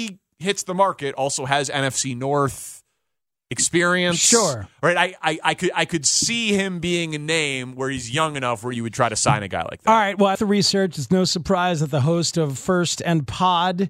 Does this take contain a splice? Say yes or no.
yes